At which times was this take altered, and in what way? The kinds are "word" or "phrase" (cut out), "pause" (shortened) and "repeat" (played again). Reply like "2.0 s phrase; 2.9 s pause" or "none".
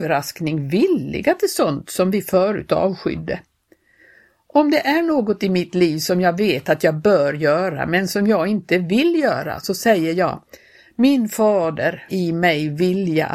12.1 s word

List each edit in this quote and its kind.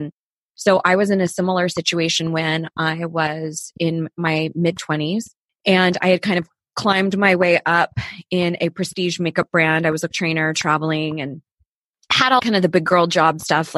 5.4 s pause; 10.1 s word; 12.4 s word

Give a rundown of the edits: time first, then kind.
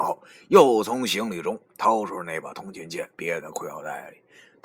3.1 s pause

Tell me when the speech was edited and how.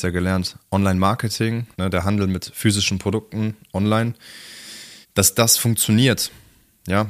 1.7 s pause; 5.0 s pause

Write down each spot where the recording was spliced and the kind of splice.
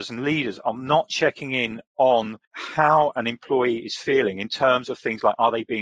2.4 s pause

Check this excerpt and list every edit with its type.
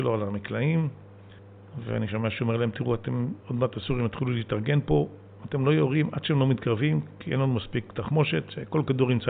3.4 s pause

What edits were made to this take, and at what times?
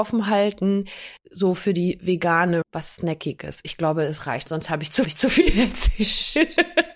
1.2 s word; 2.6 s word; 4.5 s word; 5.0 s repeat

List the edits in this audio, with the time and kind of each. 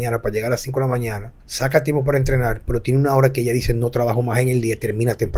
1.4 s pause

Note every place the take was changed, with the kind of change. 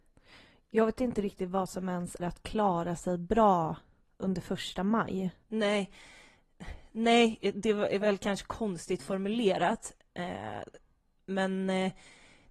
2.2 s word; 5.4 s pause

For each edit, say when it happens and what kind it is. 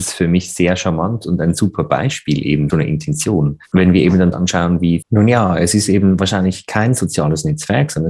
2.7 s phrase; 4.3 s word; 5.0 s phrase

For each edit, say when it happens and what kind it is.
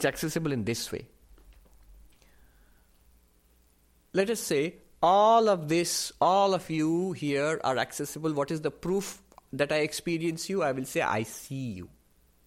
none

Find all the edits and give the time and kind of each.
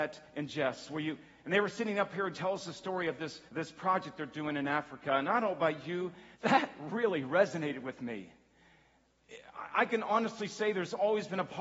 3.5 s pause; 6.3 s pause

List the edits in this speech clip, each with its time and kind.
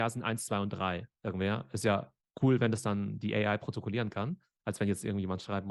1.2 s pause

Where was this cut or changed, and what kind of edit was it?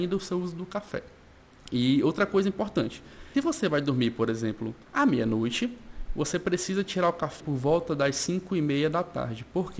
3.3 s word; 4.8 s pause; 7.4 s word

